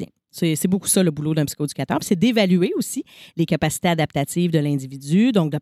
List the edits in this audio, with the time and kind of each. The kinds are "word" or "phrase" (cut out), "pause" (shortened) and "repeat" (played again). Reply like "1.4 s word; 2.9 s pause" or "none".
none